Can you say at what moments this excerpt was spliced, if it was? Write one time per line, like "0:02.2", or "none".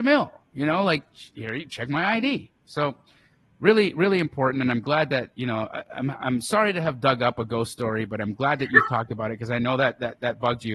none